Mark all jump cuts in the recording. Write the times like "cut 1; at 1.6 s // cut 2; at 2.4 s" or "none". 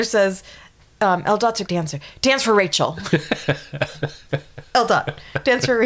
cut 1; at 1.7 s